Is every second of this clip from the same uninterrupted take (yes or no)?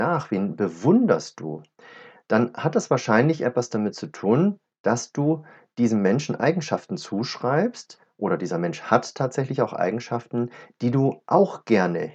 yes